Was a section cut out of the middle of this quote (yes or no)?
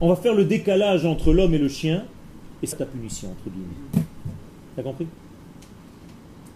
yes